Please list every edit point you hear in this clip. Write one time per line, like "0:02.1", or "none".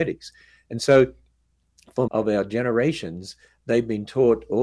0:02.1